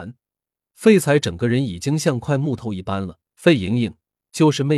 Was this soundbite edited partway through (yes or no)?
yes